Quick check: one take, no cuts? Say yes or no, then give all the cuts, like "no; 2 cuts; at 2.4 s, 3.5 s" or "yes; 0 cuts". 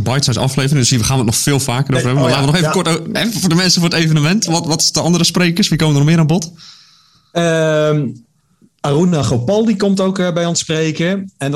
yes; 0 cuts